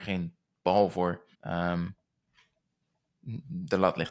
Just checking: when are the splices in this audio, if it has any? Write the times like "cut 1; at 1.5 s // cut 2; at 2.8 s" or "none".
cut 1; at 1.3 s